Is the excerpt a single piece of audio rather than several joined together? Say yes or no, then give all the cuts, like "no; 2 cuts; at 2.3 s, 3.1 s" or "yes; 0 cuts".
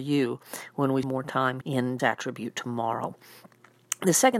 no; 3 cuts; at 1.0 s, 1.6 s, 2.0 s